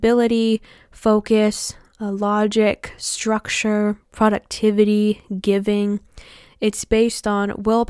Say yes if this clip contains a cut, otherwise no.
no